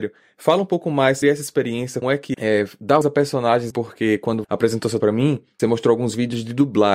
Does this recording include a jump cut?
yes; 8 cuts; at 1.2 s, 2.0 s, 2.3 s, 3.0 s, 3.7 s, 4.4 s, 5.0 s, 5.6 s

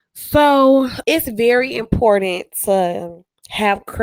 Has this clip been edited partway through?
yes; 1 cut; at 1.0 s

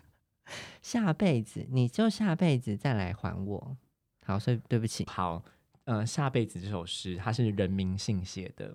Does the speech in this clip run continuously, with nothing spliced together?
no; 1 cut; at 5.1 s

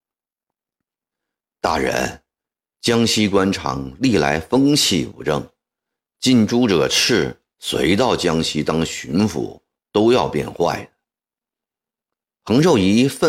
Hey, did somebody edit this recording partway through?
yes; 1 cut; at 7.5 s

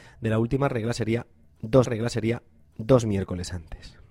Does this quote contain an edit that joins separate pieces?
yes; 1 cut; at 1.8 s

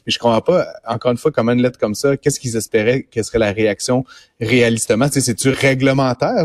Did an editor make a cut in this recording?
no; 0 cuts

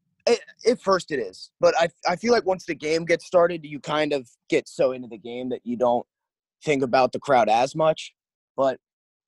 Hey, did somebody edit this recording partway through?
no; 0 cuts

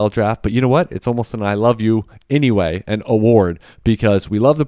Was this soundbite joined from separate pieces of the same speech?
yes; 1 cut; at 3.0 s

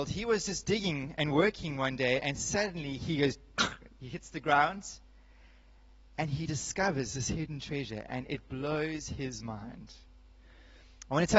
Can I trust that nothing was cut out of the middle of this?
yes; 0 cuts

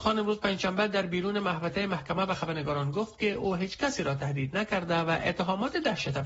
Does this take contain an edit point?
no; 0 cuts

